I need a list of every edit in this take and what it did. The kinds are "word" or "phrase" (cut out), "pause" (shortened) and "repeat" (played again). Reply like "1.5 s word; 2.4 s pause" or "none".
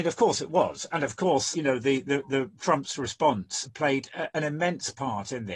none